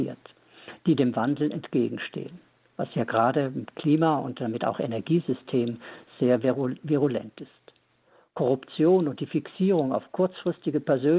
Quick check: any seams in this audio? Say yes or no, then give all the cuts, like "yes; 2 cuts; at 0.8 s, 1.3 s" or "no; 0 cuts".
no; 0 cuts